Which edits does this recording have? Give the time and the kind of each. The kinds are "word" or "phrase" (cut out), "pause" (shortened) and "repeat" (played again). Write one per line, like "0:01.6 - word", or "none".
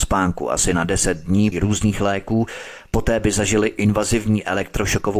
0:01.5 - word